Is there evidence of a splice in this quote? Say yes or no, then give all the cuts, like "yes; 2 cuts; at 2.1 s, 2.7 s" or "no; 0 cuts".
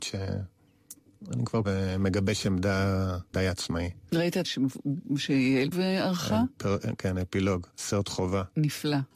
yes; 5 cuts; at 1.6 s, 3.3 s, 4.4 s, 5.7 s, 7.7 s